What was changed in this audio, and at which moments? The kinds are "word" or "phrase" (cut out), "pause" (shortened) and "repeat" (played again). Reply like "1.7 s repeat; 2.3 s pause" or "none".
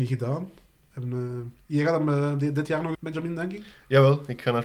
2.9 s word